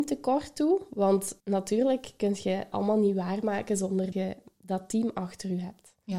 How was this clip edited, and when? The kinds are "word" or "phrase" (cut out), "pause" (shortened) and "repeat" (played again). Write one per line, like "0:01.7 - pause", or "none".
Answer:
0:01.4 - pause
0:02.7 - word
0:04.1 - word